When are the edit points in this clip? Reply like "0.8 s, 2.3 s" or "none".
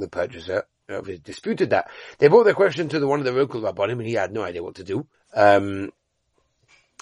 5.1 s